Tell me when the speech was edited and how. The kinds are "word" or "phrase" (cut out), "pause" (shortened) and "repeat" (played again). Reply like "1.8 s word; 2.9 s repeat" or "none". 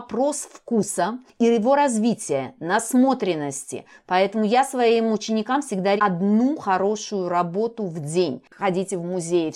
6.0 s phrase